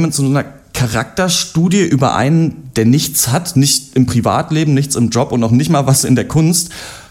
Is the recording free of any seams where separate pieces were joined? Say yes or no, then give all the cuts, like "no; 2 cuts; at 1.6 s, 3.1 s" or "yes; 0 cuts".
yes; 0 cuts